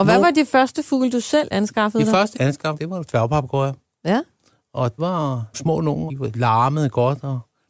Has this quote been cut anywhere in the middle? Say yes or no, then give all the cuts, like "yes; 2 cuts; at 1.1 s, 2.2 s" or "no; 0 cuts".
yes; 6 cuts; at 1.5 s, 2.3 s, 2.7 s, 5.0 s, 5.5 s, 6.1 s